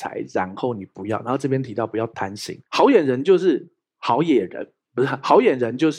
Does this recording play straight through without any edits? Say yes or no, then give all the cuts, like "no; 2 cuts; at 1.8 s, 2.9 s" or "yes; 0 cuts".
no; 1 cut; at 2.7 s